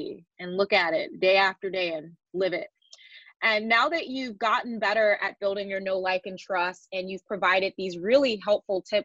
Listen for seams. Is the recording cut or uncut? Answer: uncut